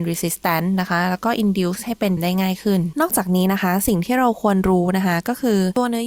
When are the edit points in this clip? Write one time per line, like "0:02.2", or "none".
0:02.2